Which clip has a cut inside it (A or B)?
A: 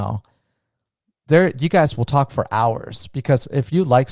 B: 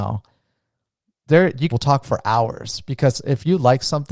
B